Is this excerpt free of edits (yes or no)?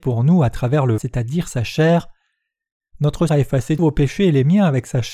no